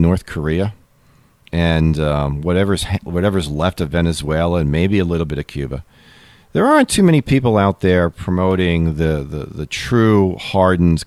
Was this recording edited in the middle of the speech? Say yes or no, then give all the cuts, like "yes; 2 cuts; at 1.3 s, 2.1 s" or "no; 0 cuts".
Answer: no; 0 cuts